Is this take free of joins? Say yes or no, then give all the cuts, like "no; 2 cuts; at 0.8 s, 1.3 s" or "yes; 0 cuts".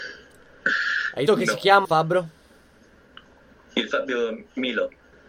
no; 2 cuts; at 1.3 s, 1.8 s